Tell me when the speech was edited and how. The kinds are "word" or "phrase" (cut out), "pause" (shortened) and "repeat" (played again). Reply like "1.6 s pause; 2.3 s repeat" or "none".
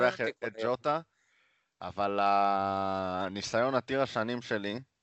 none

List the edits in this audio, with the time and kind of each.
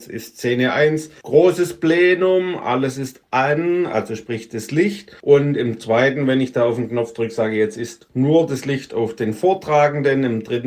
none

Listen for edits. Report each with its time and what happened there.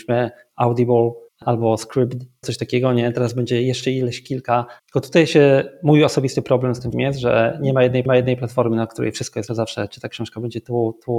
1.3 s pause; 2.4 s word; 4.8 s pause; 6.9 s word; 8.1 s repeat; 9.5 s phrase

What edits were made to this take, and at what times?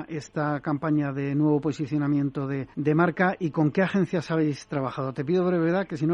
2.7 s pause

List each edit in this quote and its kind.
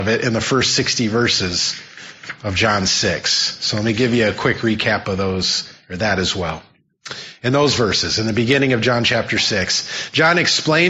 none

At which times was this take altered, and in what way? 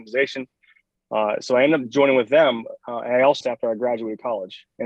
3.4 s phrase

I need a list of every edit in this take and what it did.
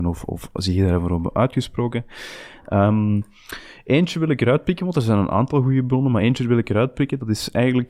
none

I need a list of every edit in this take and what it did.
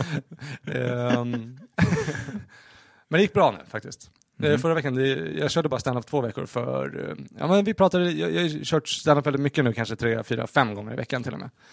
none

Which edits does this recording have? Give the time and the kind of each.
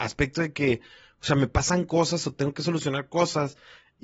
none

